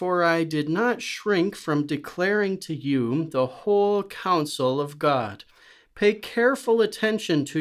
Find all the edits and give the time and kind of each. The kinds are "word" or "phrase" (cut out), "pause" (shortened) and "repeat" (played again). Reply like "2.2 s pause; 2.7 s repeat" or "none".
none